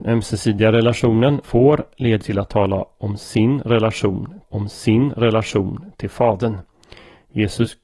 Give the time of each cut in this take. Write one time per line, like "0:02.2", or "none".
0:01.4
0:02.2
0:04.4